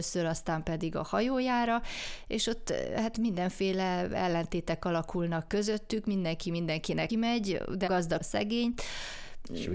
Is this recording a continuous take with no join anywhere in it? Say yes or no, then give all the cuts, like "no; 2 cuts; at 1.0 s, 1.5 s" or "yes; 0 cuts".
no; 4 cuts; at 5.5 s, 7.1 s, 7.9 s, 8.2 s